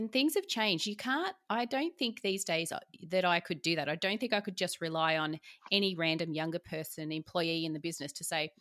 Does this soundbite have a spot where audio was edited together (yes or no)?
no